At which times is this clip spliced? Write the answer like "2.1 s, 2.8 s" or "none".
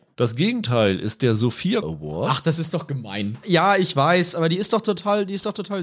1.8 s

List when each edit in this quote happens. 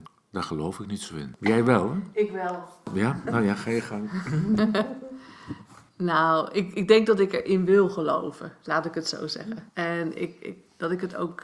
5.9 s, 9.7 s

